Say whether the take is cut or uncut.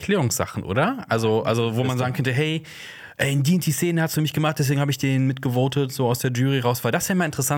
uncut